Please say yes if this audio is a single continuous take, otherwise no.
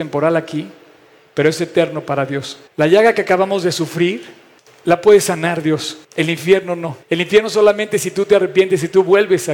no